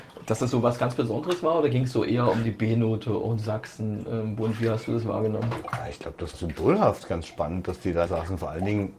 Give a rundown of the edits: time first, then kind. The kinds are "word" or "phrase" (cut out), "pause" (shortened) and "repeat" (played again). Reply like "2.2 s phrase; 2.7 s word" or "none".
6.3 s word; 8.1 s word